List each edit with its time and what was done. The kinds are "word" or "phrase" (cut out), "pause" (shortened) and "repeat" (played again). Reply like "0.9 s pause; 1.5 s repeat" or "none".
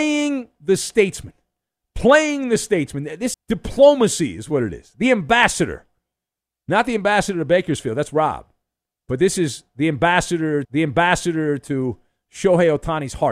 3.3 s word; 10.6 s repeat